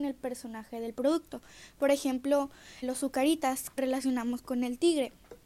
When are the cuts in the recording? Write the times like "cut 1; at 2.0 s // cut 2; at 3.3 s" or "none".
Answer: cut 1; at 2.8 s // cut 2; at 3.8 s